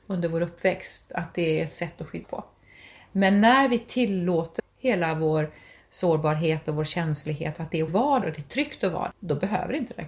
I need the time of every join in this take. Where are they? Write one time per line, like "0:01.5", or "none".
0:02.2
0:04.6
0:07.9
0:08.2
0:09.1